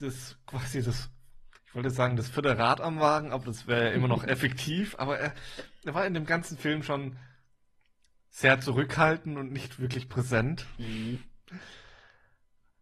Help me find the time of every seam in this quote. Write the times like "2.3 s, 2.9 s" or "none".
1.6 s